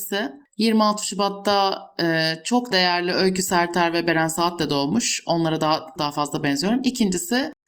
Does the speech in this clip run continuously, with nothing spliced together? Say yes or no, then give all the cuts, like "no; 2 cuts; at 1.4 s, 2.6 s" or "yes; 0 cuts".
no; 2 cuts; at 2.7 s, 6.0 s